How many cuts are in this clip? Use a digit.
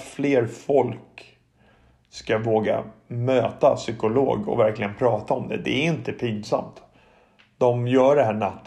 0